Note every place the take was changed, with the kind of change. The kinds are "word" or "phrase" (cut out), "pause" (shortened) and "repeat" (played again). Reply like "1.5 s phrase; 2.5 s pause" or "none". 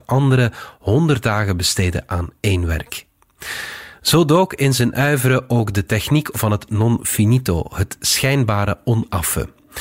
6.3 s word